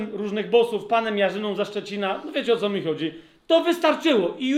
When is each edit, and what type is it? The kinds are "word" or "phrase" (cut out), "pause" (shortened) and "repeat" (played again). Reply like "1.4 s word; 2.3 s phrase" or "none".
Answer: none